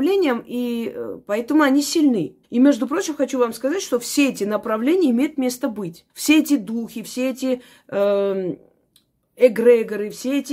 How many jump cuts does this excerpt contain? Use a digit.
2